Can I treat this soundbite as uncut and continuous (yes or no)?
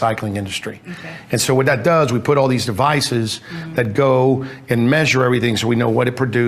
yes